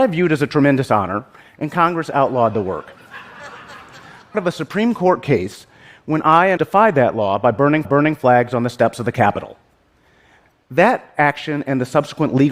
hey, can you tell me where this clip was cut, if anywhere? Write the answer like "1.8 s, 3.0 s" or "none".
4.3 s, 6.6 s, 7.8 s